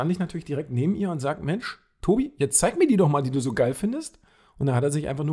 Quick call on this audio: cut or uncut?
uncut